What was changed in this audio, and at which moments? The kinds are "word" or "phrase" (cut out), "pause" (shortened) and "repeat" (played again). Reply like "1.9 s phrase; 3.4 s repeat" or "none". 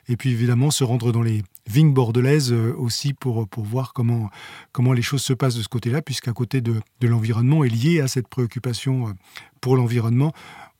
none